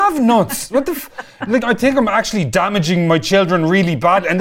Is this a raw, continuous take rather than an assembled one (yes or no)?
no